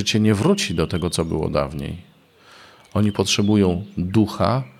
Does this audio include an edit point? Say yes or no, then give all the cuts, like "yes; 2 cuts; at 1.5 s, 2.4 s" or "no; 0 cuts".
no; 0 cuts